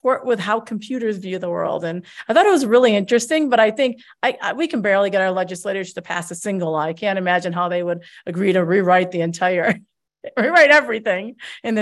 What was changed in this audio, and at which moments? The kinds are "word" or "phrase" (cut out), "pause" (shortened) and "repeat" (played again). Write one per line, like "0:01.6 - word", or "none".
none